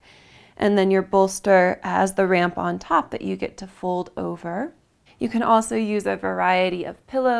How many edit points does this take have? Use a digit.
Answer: 1